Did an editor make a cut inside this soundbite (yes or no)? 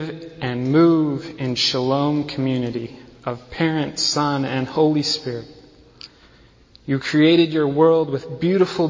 no